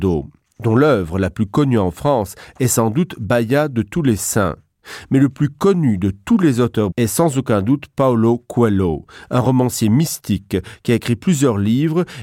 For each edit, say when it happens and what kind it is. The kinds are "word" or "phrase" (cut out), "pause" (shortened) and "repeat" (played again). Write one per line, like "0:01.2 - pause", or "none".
0:06.9 - word